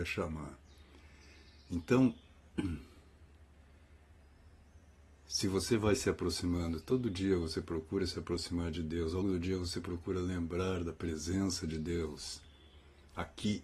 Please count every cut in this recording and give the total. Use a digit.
1